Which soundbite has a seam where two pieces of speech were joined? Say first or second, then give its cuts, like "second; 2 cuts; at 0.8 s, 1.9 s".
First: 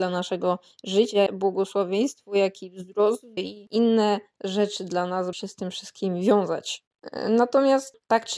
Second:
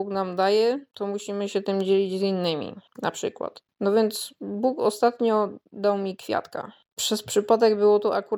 first; 4 cuts; at 1.3 s, 3.4 s, 4.3 s, 5.3 s